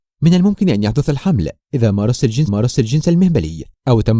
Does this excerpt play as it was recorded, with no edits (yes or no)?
no